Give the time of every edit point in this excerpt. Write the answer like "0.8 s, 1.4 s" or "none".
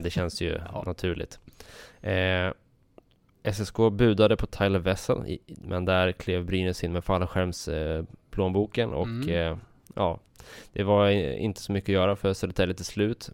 none

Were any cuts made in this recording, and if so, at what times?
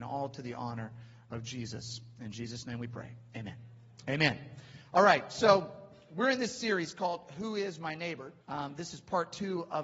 8.4 s

